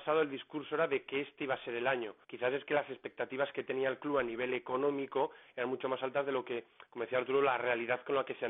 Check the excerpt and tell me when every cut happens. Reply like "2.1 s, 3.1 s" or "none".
2.2 s